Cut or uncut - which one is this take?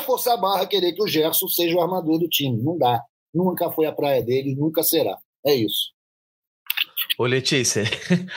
uncut